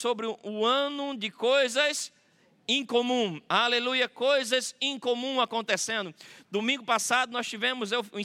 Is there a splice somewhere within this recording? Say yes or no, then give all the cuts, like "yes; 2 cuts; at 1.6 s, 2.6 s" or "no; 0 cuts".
no; 0 cuts